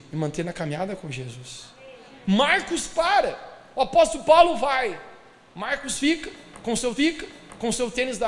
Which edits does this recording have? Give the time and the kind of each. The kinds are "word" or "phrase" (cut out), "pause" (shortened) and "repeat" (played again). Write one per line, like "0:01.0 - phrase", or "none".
0:07.0 - repeat